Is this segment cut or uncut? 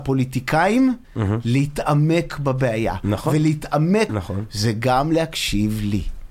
cut